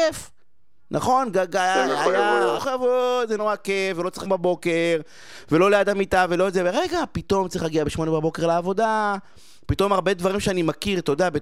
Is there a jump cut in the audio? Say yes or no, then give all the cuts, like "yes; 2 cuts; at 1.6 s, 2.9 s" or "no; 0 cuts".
yes; 3 cuts; at 2.6 s, 3.4 s, 4.3 s